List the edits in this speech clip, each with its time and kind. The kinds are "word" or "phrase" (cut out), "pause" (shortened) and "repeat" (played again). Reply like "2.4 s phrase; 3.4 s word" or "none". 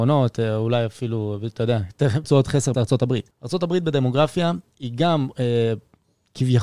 2.2 s phrase; 2.7 s word; 3.3 s pause